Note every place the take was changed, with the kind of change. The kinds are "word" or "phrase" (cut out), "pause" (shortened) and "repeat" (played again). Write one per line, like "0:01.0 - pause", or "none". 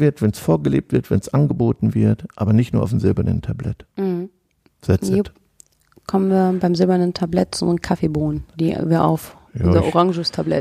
none